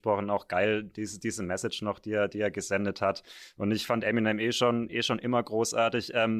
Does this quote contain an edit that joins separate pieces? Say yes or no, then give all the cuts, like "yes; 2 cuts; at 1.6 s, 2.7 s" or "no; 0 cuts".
no; 0 cuts